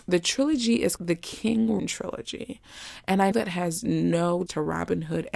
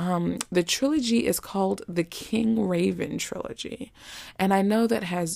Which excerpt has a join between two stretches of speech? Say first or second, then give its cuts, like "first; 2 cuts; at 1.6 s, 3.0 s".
first; 4 cuts; at 1.0 s, 1.8 s, 3.3 s, 4.5 s